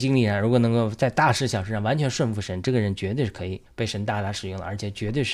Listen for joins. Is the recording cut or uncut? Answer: cut